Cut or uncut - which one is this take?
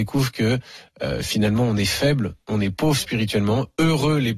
uncut